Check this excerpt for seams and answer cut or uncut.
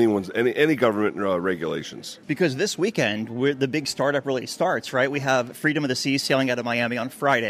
uncut